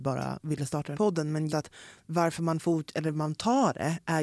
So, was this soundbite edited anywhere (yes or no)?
yes